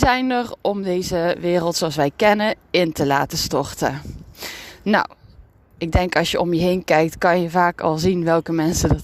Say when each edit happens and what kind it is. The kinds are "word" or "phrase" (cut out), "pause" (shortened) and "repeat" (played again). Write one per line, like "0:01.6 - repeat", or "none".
none